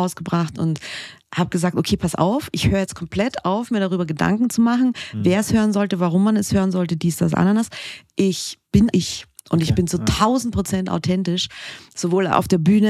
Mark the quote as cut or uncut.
cut